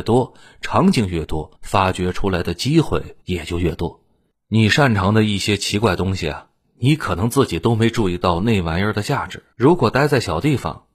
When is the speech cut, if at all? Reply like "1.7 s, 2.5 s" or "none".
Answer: 1.5 s, 3.2 s, 9.5 s